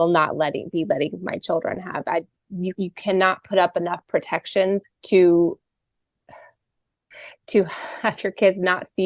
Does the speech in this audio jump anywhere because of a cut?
yes; 2 cuts; at 2.7 s, 4.8 s

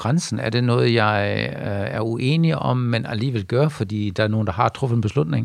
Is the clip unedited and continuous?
yes; 0 cuts

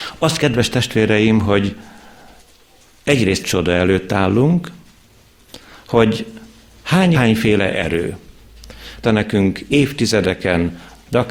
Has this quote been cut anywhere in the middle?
yes; 3 cuts; at 3.4 s, 7.1 s, 9.0 s

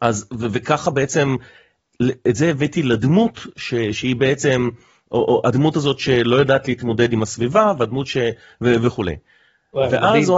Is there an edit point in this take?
no; 0 cuts

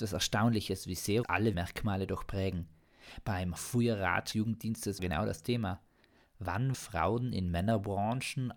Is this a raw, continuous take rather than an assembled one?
no; 6 cuts; at 1.2 s, 1.5 s, 3.6 s, 4.3 s, 5.0 s, 6.7 s

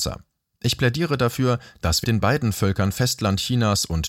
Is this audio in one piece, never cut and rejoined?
no; 1 cut; at 2.0 s

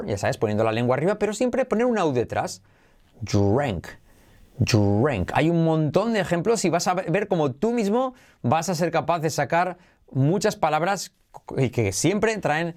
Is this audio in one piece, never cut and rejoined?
yes; 0 cuts

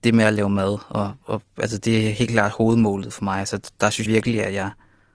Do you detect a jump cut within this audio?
yes; 1 cut; at 4.0 s

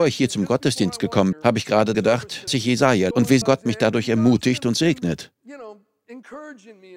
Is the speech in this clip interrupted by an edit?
yes; 5 cuts; at 1.3 s, 1.9 s, 2.5 s, 3.1 s, 3.4 s

